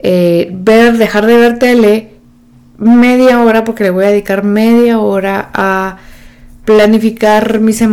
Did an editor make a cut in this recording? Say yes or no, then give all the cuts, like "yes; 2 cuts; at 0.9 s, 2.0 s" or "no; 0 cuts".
no; 0 cuts